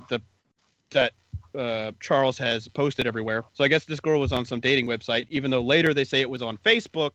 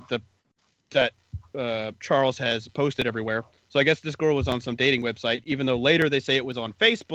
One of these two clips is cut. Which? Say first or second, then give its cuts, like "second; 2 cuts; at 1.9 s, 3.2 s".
first; 1 cut; at 3.5 s